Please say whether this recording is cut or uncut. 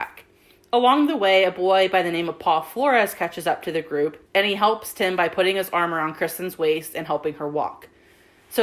cut